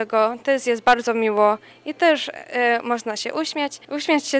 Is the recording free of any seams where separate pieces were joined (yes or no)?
yes